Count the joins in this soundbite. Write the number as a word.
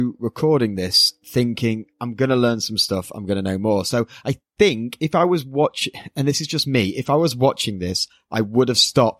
one